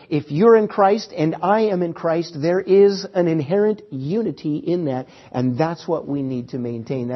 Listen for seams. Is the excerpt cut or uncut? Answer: uncut